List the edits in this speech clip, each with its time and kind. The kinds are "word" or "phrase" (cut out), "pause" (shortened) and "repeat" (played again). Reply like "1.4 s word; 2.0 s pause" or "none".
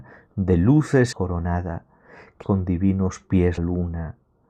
1.1 s word; 2.4 s word; 3.6 s word

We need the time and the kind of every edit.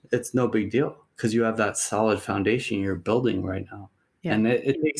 none

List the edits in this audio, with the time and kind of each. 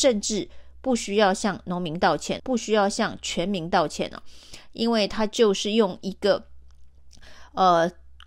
2.4 s word

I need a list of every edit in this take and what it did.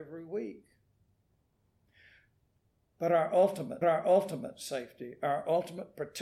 3.8 s repeat

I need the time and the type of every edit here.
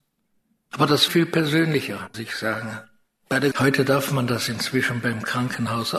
1.1 s phrase; 2.1 s word; 3.5 s phrase

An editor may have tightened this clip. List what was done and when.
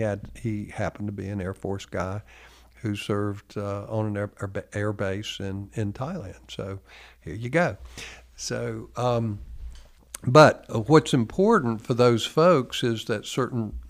none

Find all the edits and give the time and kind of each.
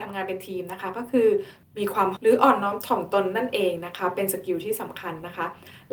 2.2 s word

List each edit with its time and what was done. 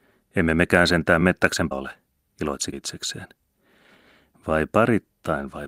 1.2 s word; 1.7 s word; 2.7 s word

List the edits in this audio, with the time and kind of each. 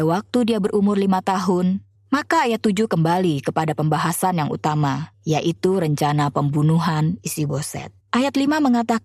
1.9 s pause; 5.1 s pause; 8.0 s pause

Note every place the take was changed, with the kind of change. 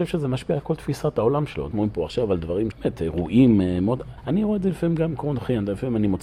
1.7 s word; 2.7 s word; 4.2 s pause

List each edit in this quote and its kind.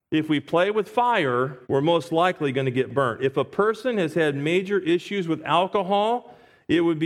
1.6 s pause

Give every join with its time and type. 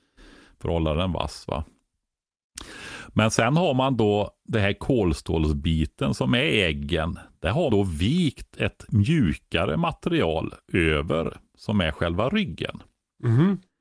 7.7 s word

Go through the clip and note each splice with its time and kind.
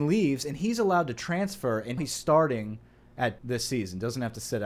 2.0 s word; 3.4 s word

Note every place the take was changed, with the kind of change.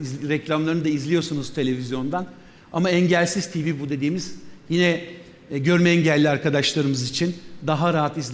none

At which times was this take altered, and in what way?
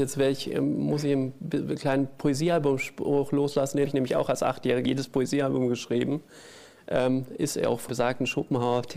3.8 s word; 4.8 s word; 7.9 s word

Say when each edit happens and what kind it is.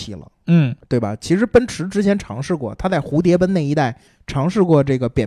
4.1 s pause

